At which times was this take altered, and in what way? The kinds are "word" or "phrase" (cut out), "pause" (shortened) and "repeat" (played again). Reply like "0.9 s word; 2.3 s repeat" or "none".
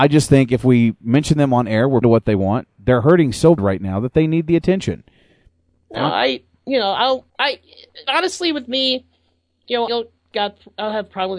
2.0 s word; 3.6 s word; 7.3 s pause; 9.9 s word